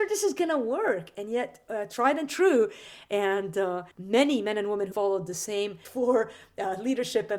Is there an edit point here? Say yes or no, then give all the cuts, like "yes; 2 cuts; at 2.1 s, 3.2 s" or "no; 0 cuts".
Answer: yes; 3 cuts; at 3.9 s, 4.9 s, 5.8 s